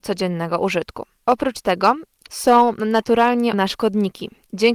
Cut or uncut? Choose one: cut